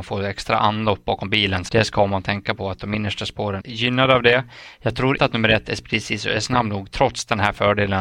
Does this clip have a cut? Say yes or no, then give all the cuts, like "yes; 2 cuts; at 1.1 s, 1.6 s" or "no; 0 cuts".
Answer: yes; 3 cuts; at 1.7 s, 3.6 s, 5.2 s